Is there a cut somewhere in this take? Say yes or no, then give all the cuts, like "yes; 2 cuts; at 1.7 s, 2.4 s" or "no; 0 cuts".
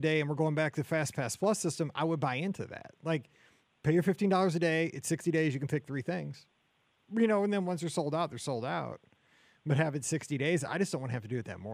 no; 0 cuts